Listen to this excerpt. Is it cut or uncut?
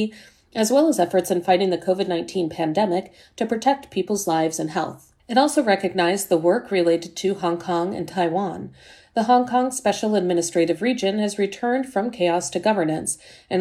cut